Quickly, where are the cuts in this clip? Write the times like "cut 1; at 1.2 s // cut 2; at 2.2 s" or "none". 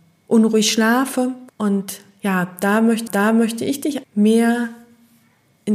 cut 1; at 1.5 s // cut 2; at 3.1 s // cut 3; at 4.0 s